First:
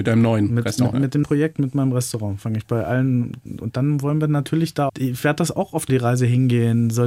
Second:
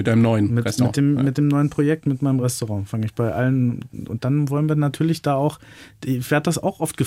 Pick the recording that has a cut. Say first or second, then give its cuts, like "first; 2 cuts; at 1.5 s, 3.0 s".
first; 4 cuts; at 0.9 s, 1.2 s, 4.9 s, 5.9 s